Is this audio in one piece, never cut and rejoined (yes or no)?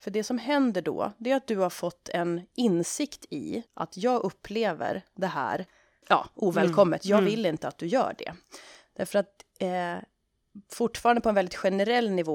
no